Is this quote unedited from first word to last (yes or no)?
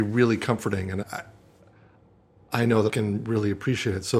no